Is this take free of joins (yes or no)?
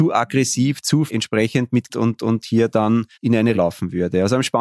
no